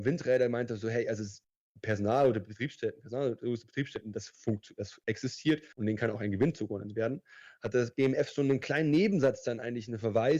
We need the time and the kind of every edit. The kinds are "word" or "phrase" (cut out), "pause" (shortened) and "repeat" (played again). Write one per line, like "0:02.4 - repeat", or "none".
0:05.7 - pause